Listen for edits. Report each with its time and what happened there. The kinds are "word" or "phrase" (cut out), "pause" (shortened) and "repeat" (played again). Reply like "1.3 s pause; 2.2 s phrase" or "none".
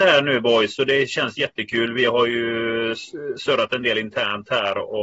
none